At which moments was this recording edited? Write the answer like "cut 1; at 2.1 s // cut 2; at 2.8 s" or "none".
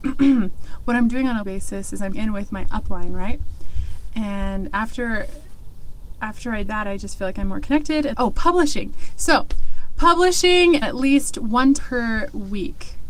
cut 1; at 1.4 s // cut 2; at 2.1 s // cut 3; at 6.7 s // cut 4; at 8.1 s // cut 5; at 10.8 s // cut 6; at 11.8 s